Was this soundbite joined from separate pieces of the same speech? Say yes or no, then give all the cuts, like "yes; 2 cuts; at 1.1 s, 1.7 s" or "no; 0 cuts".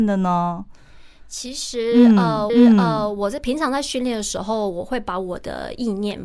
yes; 1 cut; at 2.5 s